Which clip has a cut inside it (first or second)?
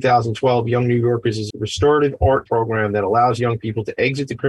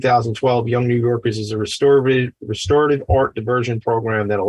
first